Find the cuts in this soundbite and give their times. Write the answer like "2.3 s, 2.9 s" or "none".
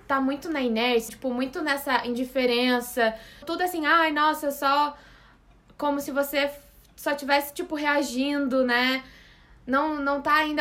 1.1 s, 3.4 s